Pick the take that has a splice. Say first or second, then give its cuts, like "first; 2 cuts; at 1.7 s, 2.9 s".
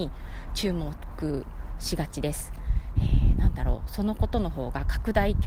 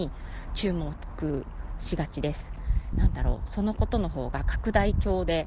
second; 1 cut; at 2.9 s